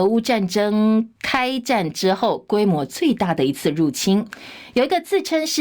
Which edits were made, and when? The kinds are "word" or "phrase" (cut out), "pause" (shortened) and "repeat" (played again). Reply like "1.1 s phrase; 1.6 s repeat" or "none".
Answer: 1.2 s pause